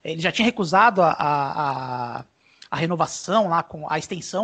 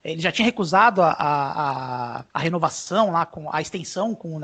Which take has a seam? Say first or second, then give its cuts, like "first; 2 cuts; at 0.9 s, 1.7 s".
second; 1 cut; at 2.3 s